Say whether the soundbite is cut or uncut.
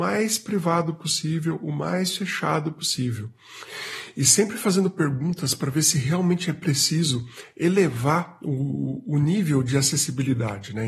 uncut